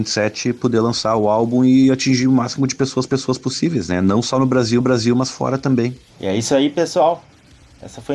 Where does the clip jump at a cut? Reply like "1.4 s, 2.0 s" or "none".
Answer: 3.1 s, 4.8 s